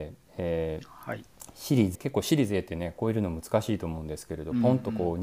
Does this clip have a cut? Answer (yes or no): yes